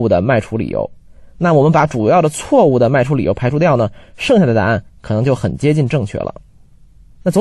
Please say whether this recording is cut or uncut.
cut